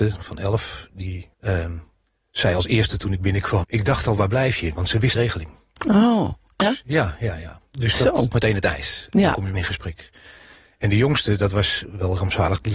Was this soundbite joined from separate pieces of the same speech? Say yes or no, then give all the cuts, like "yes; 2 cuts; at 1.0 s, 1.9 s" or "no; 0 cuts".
yes; 6 cuts; at 1.3 s, 3.6 s, 5.1 s, 6.6 s, 8.3 s, 9.5 s